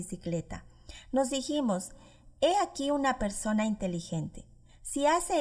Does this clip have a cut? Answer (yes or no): no